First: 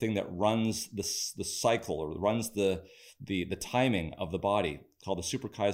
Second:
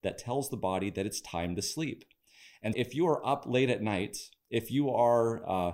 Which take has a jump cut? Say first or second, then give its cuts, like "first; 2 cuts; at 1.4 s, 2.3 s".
second; 1 cut; at 2.7 s